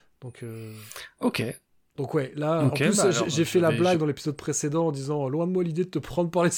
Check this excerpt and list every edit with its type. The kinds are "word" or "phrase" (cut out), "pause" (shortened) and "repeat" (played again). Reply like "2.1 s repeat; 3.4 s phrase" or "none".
none